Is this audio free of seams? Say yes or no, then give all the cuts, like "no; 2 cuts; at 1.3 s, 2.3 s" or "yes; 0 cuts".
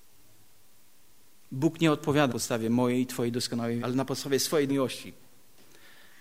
no; 3 cuts; at 2.3 s, 3.8 s, 4.7 s